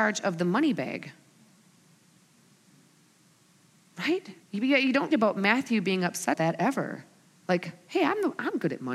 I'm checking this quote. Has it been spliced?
yes; 4 cuts; at 4.4 s, 5.1 s, 6.3 s, 7.2 s

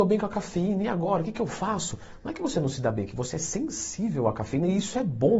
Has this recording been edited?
no; 0 cuts

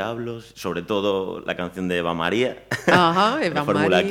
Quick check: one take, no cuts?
yes; 0 cuts

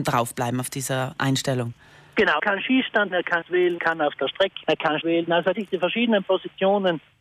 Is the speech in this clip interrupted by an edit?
yes; 7 cuts; at 2.4 s, 3.1 s, 3.4 s, 3.8 s, 4.6 s, 5.0 s, 5.5 s

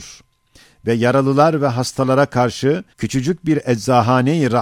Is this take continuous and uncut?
no; 1 cut; at 2.9 s

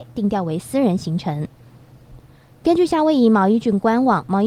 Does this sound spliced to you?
no; 0 cuts

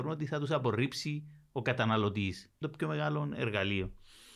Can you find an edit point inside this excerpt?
yes; 1 cut; at 2.6 s

